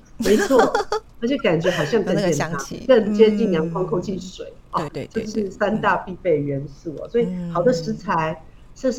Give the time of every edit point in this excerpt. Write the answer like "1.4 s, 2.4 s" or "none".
4.9 s